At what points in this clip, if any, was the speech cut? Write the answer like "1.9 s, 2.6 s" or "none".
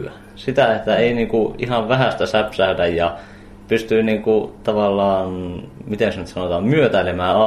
none